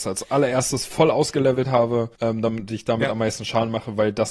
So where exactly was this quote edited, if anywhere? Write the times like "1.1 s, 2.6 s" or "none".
2.1 s